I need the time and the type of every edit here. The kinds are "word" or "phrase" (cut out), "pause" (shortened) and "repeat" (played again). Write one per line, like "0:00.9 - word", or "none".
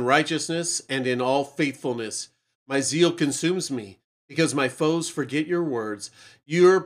none